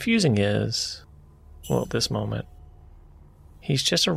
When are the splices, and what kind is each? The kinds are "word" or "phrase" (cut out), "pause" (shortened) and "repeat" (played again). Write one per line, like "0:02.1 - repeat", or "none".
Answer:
0:01.8 - word